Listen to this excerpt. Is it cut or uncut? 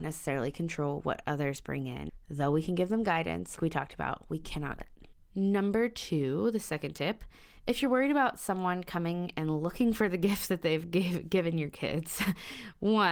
cut